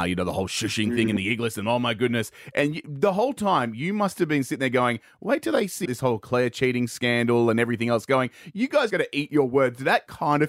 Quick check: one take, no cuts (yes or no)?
no